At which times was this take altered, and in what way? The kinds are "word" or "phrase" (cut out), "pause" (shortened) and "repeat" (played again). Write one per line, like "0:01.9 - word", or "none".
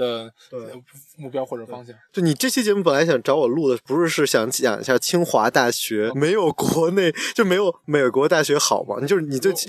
0:06.1 - word